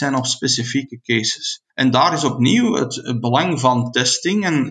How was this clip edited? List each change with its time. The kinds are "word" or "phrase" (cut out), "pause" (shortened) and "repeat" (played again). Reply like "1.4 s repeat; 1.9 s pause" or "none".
1.7 s pause